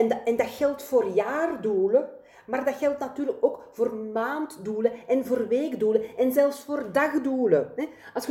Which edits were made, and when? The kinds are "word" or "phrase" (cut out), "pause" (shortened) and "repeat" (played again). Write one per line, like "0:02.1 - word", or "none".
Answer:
none